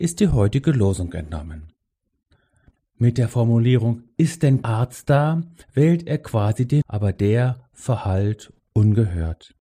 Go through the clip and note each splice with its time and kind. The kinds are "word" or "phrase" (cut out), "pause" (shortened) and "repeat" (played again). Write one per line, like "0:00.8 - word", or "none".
0:04.6 - word
0:05.6 - pause
0:06.8 - word